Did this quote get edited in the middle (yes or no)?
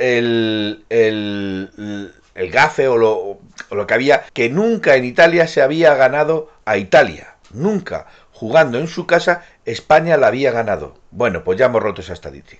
yes